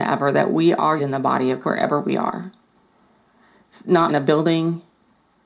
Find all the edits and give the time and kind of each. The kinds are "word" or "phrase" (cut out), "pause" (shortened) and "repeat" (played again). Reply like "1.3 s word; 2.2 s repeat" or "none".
1.0 s word; 1.6 s word; 4.1 s word